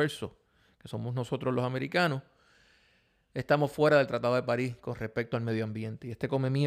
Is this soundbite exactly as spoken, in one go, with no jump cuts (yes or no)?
yes